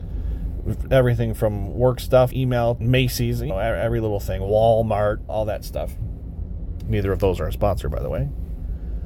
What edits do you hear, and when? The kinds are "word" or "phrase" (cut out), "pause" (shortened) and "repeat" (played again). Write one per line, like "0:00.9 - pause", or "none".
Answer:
0:02.3 - word
0:02.8 - word
0:03.5 - word
0:05.3 - word